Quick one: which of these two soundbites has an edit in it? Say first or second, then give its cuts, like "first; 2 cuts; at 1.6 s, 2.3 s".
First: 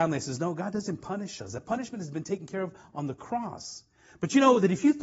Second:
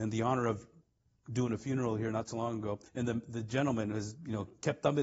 second; 1 cut; at 2.9 s